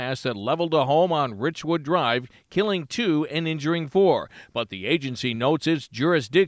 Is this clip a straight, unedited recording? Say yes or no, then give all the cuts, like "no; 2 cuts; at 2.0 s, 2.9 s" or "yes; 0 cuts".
yes; 0 cuts